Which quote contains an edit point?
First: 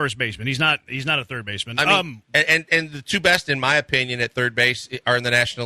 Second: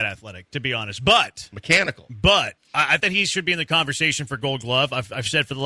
second; 1 cut; at 3.0 s

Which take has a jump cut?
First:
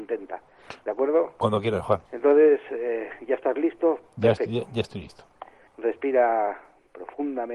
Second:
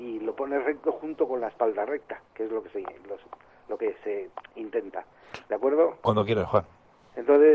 first; 2 cuts; at 2.0 s, 5.7 s

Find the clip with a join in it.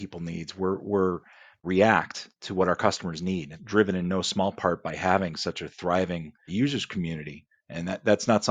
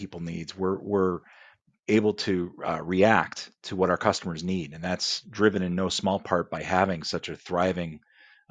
first; 3 cuts; at 1.6 s, 3.5 s, 6.5 s

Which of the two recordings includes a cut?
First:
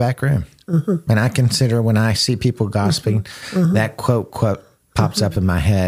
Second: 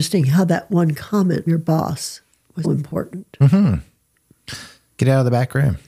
second; 2 cuts; at 1.5 s, 2.6 s

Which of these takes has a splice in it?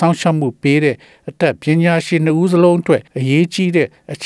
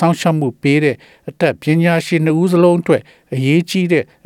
first; 1 cut; at 3.1 s

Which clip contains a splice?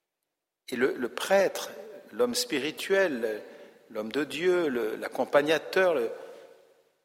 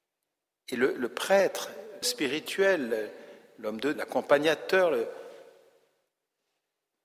second; 2 cuts; at 2.0 s, 3.9 s

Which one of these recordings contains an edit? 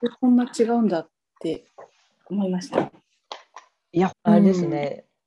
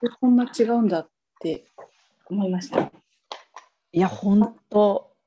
first; 1 cut; at 4.1 s

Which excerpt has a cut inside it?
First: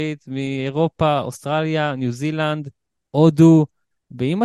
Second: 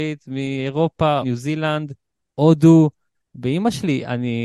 second; 1 cut; at 1.2 s

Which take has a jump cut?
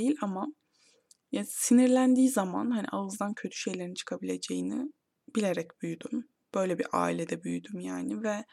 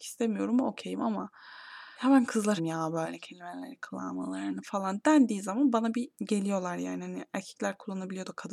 second; 3 cuts; at 1.9 s, 2.6 s, 6.1 s

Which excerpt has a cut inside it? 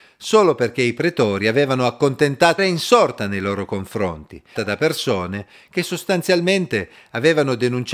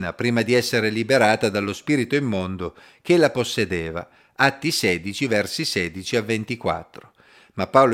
first; 2 cuts; at 2.6 s, 4.6 s

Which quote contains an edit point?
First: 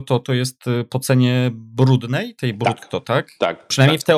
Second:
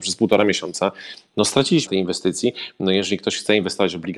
second; 1 cut; at 1.9 s

